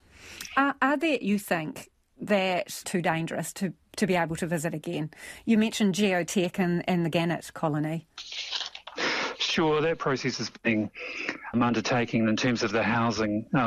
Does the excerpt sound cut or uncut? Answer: cut